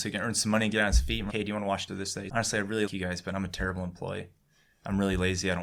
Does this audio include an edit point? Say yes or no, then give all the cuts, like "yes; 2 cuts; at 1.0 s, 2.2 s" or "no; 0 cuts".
yes; 4 cuts; at 1.3 s, 1.9 s, 2.3 s, 2.9 s